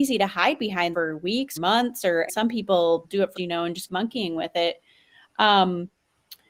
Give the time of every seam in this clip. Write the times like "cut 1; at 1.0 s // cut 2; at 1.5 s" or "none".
cut 1; at 0.9 s // cut 2; at 1.6 s // cut 3; at 2.3 s // cut 4; at 3.0 s // cut 5; at 3.4 s // cut 6; at 3.9 s